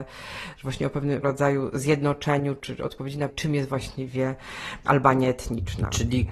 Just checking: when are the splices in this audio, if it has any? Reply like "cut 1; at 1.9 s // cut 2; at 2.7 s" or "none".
cut 1; at 1.2 s // cut 2; at 2.6 s // cut 3; at 3.3 s